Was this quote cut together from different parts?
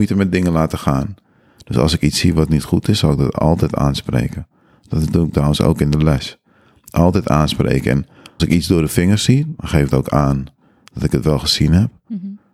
yes; 2 cuts; at 8.4 s, 9.9 s

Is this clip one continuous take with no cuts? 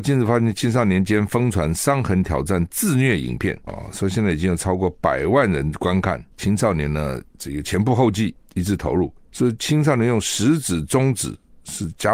no; 2 cuts; at 3.7 s, 6.3 s

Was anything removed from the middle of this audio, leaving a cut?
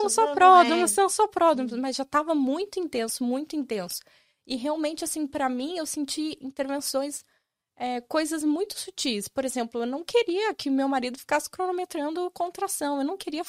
no; 0 cuts

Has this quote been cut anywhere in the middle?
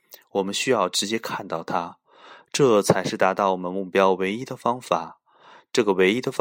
no; 0 cuts

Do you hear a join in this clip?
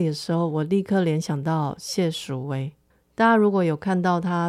yes; 1 cut; at 2.9 s

